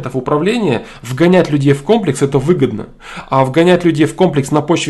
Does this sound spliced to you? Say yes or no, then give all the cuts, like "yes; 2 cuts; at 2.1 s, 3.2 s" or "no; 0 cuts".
no; 0 cuts